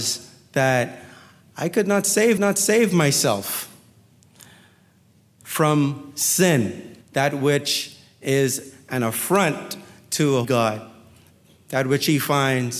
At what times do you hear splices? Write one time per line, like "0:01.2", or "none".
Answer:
0:02.4
0:07.0
0:10.4